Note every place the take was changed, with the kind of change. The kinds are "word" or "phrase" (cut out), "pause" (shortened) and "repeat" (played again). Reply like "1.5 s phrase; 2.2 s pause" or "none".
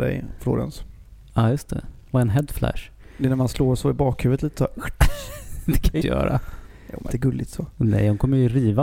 6.0 s word; 7.1 s word